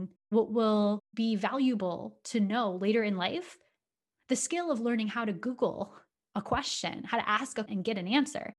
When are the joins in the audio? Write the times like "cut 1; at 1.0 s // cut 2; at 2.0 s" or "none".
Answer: cut 1; at 7.7 s